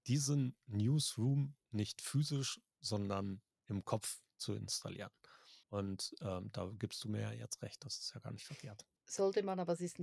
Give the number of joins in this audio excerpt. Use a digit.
2